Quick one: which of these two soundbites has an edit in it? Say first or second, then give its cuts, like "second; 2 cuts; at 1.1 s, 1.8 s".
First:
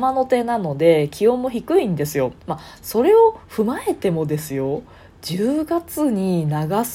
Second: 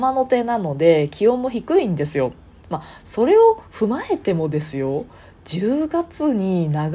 first; 1 cut; at 2.4 s